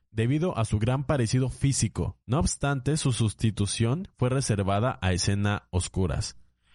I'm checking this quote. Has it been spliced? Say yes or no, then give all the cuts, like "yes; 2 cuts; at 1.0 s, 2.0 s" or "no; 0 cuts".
yes; 1 cut; at 2.2 s